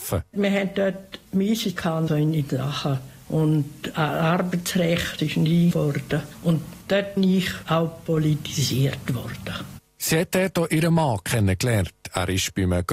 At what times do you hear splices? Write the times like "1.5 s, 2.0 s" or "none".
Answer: 1.8 s, 2.1 s, 3.2 s, 5.2 s, 5.7 s, 7.2 s